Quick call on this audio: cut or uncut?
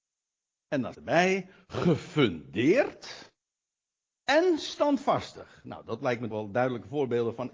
cut